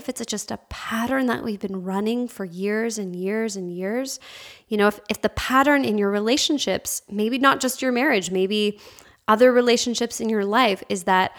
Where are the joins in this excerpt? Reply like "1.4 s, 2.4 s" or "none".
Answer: none